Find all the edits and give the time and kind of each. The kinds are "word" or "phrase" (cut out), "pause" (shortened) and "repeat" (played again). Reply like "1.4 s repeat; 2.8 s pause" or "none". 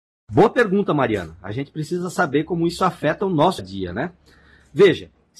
3.6 s word